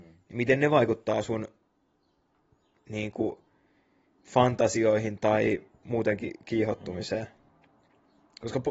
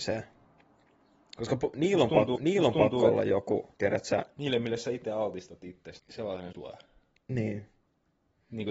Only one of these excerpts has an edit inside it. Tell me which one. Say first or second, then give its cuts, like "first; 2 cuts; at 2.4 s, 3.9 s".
second; 4 cuts; at 2.4 s, 3.7 s, 6.0 s, 6.5 s